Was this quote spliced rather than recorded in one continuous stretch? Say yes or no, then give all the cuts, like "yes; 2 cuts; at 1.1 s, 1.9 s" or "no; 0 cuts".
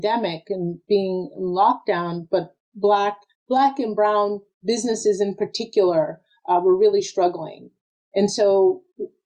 no; 0 cuts